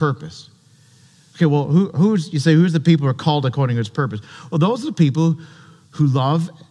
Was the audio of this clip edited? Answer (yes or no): no